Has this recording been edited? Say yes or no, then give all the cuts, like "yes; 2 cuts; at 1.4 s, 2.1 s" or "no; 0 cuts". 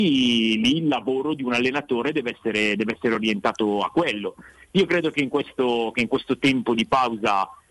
no; 0 cuts